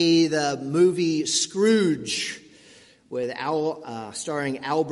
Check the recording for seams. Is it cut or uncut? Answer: uncut